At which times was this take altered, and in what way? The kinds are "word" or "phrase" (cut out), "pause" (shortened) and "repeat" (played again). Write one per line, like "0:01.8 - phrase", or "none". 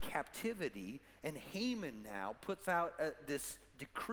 none